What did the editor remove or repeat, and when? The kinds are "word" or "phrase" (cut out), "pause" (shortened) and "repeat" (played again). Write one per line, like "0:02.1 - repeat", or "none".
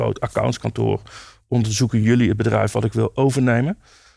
none